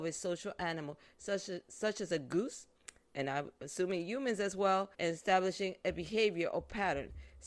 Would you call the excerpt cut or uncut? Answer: cut